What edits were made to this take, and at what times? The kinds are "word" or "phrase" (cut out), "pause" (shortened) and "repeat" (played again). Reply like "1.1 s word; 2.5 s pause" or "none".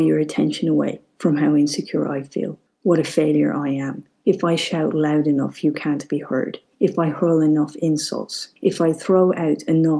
2.7 s pause; 8.6 s pause